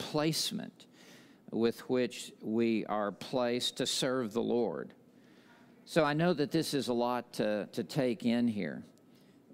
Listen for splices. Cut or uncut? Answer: uncut